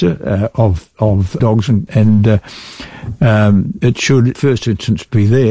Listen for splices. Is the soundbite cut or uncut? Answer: cut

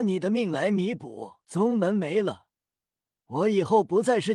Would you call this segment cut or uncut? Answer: cut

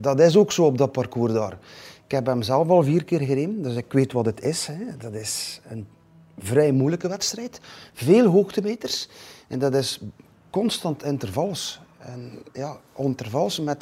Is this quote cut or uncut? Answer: uncut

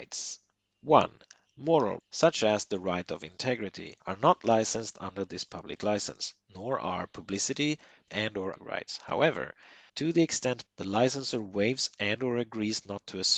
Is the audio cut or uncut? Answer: cut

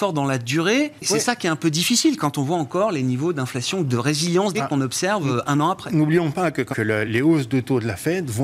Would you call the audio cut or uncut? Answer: cut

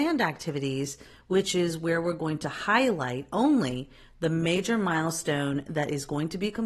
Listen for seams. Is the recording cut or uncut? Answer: uncut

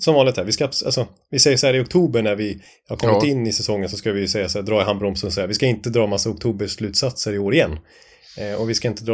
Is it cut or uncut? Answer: uncut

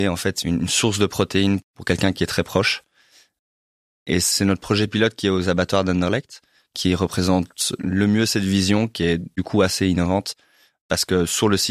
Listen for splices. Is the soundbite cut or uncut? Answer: uncut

